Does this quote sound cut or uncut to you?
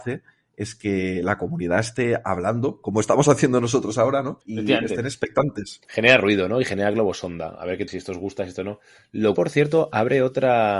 cut